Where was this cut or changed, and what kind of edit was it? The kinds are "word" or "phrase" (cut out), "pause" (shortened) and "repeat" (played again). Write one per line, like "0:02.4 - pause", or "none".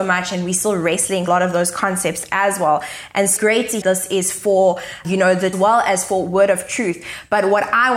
0:01.3 - phrase
0:03.4 - word
0:03.8 - phrase
0:05.0 - word
0:05.5 - phrase